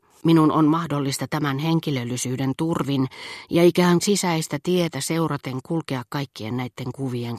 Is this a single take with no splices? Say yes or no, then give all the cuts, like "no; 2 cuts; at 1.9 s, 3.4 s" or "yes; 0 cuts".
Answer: no; 1 cut; at 4.0 s